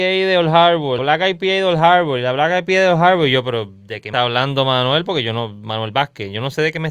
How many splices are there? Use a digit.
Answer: 2